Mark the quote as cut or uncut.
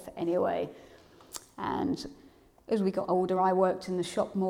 uncut